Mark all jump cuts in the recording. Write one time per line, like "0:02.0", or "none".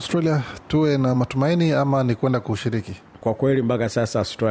none